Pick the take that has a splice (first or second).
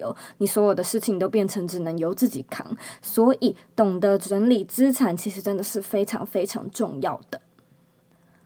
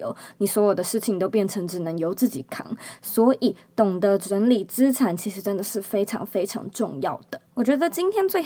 second